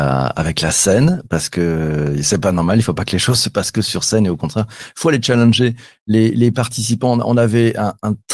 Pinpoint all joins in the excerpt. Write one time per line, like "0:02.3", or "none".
none